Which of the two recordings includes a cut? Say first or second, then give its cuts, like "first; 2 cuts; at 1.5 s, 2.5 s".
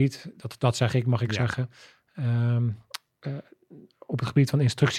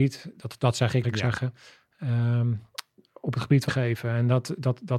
second; 3 cuts; at 1.0 s, 3.0 s, 3.7 s